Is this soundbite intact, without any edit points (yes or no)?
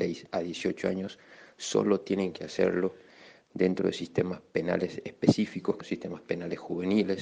no